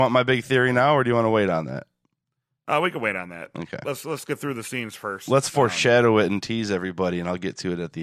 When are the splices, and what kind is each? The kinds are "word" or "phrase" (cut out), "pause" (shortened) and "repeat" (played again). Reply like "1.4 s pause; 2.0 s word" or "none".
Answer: none